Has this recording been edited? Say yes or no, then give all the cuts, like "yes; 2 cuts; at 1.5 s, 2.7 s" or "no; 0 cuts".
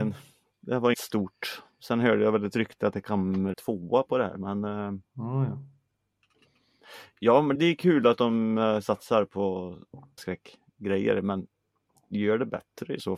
yes; 4 cuts; at 0.9 s, 3.5 s, 7.5 s, 10.2 s